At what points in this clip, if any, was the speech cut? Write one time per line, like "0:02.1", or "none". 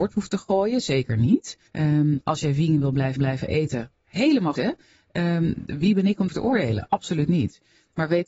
0:01.7
0:03.2
0:04.6
0:06.3